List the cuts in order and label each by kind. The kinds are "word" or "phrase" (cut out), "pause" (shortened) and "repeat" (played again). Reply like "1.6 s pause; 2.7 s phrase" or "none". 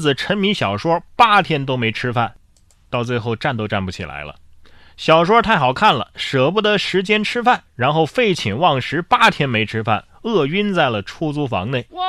none